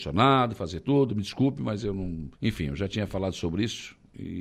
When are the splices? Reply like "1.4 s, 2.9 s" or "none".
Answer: 2.4 s